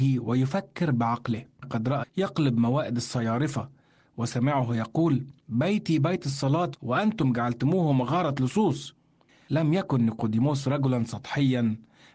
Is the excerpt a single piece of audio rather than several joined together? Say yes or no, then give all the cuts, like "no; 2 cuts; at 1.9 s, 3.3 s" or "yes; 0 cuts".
no; 4 cuts; at 1.6 s, 2.0 s, 5.4 s, 6.7 s